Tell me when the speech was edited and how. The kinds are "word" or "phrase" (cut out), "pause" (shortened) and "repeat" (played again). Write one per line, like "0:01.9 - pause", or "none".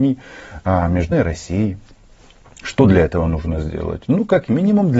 0:01.1 - word

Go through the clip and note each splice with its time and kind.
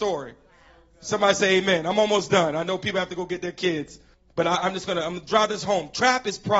0:04.1 - pause

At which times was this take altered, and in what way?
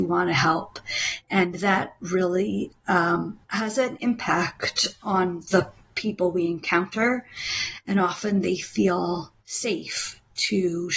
0:03.4 - pause

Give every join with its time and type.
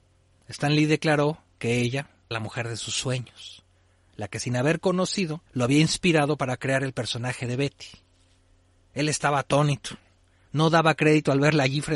0:02.3 - word
0:05.5 - pause

